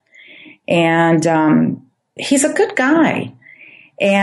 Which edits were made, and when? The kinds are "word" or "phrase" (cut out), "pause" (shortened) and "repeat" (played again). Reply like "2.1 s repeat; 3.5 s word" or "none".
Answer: 2.2 s word

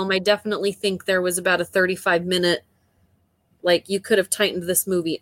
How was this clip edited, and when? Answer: none

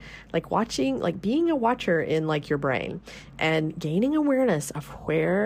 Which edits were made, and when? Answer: none

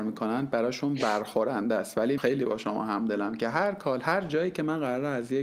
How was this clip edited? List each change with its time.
2.2 s word

